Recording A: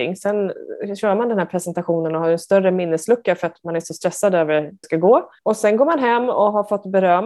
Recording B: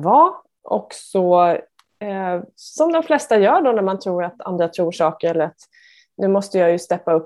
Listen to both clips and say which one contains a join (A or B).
A